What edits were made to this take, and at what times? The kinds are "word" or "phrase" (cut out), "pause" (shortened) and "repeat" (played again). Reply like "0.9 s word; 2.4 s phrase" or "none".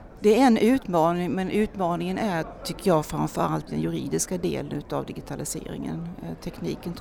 3.7 s phrase